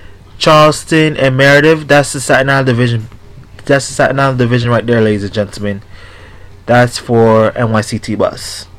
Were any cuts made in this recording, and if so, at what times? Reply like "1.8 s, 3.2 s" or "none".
none